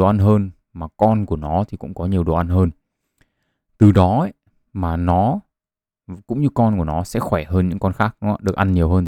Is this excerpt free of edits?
yes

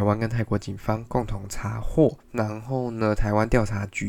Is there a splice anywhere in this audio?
yes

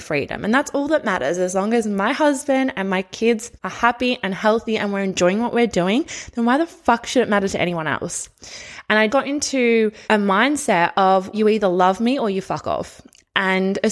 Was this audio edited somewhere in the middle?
yes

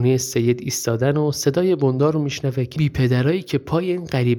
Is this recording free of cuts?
no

